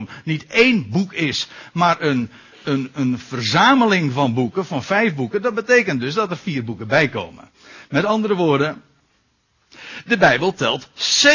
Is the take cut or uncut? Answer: uncut